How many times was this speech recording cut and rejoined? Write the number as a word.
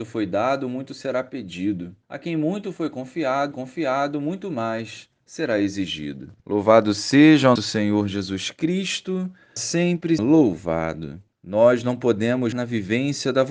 eight